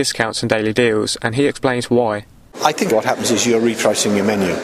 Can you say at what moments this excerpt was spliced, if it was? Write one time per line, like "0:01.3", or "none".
0:02.9